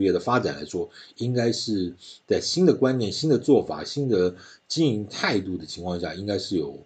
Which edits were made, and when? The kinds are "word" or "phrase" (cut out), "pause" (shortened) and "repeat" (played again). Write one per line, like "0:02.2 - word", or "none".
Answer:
none